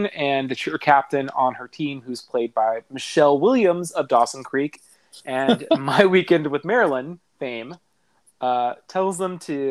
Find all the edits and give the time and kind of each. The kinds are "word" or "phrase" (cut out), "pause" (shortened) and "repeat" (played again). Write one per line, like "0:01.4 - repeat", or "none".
none